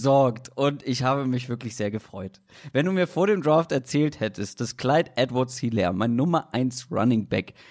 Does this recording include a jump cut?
no; 0 cuts

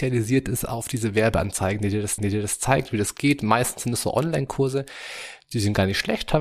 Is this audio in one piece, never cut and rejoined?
no; 1 cut; at 2.2 s

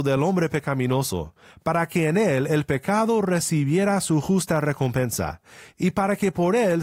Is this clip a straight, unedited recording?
yes; 0 cuts

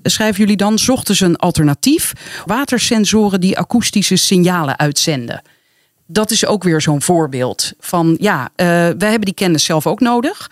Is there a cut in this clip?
yes; 1 cut; at 2.5 s

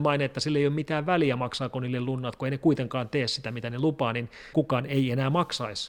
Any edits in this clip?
yes; 1 cut; at 4.5 s

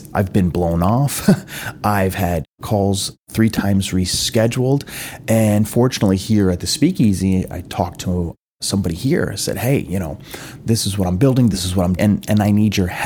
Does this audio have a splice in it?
yes; 1 cut; at 12.0 s

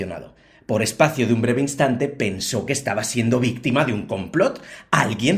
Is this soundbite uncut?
yes; 0 cuts

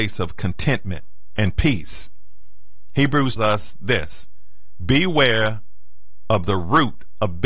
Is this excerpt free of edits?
no; 1 cut; at 3.4 s

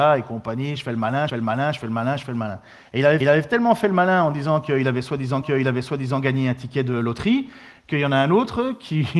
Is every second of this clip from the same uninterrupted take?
no; 3 cuts; at 1.3 s, 3.2 s, 5.4 s

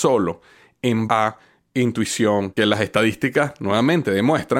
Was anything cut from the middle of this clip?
yes; 2 cuts; at 1.1 s, 2.6 s

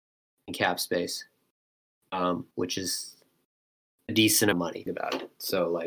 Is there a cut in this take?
yes; 3 cuts; at 2.5 s, 4.5 s, 4.9 s

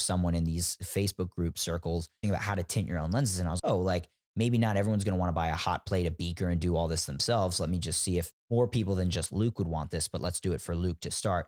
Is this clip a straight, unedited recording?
no; 3 cuts; at 2.2 s, 3.6 s, 8.3 s

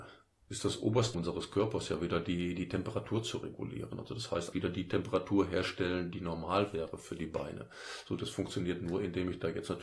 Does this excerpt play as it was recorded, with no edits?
no; 2 cuts; at 1.1 s, 4.5 s

